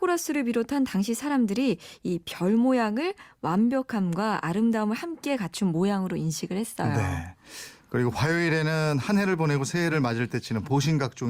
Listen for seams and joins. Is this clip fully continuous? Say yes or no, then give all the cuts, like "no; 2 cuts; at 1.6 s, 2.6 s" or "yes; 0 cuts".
yes; 0 cuts